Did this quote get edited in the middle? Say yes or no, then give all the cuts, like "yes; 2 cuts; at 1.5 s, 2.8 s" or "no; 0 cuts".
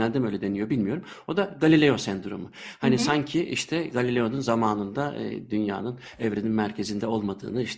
no; 0 cuts